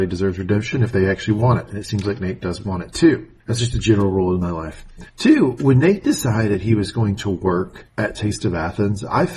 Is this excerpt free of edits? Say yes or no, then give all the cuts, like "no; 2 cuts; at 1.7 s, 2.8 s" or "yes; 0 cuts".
no; 3 cuts; at 3.4 s, 5.1 s, 7.9 s